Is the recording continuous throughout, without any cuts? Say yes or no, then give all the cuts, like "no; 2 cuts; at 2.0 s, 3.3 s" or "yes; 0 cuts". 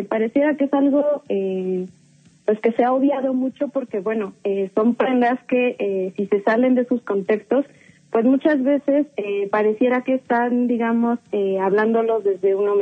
yes; 0 cuts